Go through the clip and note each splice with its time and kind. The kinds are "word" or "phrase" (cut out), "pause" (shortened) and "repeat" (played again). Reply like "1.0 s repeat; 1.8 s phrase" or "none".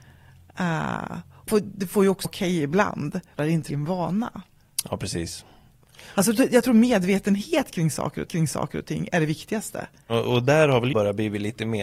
1.5 s word; 2.2 s word; 3.4 s word; 3.7 s word; 8.3 s repeat; 10.9 s word